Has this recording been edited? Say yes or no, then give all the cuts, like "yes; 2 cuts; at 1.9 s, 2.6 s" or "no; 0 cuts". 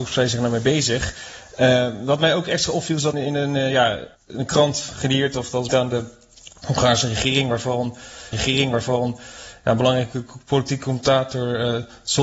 yes; 4 cuts; at 3.1 s, 4.1 s, 5.7 s, 8.3 s